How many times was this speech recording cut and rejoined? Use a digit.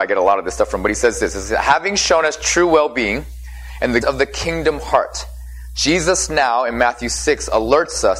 1